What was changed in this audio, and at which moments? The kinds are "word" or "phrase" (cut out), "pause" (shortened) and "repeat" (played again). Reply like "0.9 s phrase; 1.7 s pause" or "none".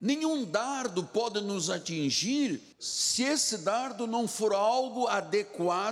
2.7 s pause